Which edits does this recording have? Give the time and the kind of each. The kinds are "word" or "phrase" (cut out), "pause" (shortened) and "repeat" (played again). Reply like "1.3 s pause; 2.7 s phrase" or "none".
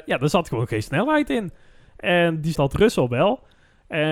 2.6 s word

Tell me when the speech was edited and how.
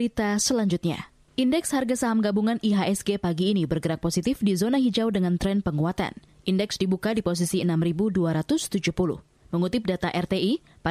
none

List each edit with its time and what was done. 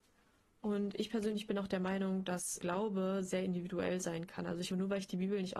2.6 s word; 4.7 s word

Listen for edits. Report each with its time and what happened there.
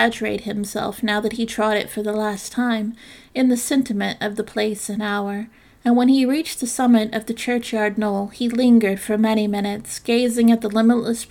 none

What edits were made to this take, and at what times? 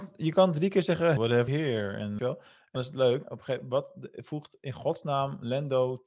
1.2 s word; 1.5 s word; 2.2 s word; 2.8 s word; 3.2 s word

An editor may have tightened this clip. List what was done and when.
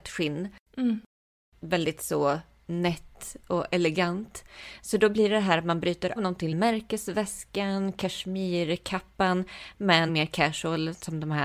6.2 s word; 6.5 s phrase; 10.1 s word

